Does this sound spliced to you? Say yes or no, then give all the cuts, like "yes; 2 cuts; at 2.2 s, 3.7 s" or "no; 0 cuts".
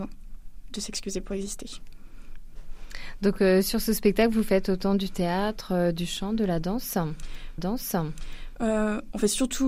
yes; 1 cut; at 7.6 s